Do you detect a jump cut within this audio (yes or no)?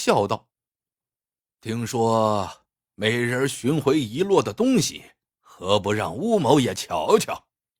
yes